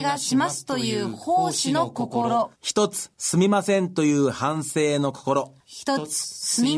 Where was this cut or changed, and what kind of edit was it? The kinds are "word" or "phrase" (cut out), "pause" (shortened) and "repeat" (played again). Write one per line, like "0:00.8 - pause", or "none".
0:02.6 - pause
0:03.1 - pause
0:05.6 - pause